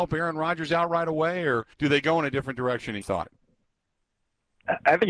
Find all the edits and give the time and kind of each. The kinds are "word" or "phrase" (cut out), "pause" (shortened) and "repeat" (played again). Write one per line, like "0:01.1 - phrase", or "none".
0:01.7 - pause
0:03.0 - word